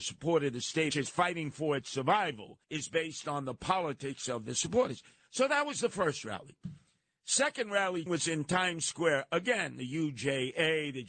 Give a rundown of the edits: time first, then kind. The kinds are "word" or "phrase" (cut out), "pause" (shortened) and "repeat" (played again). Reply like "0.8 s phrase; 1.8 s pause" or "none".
0.9 s phrase; 2.6 s pause; 8.1 s word